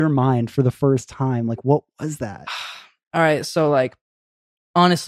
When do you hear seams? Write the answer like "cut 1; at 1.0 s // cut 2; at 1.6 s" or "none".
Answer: none